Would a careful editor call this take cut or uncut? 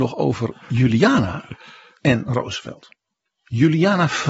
uncut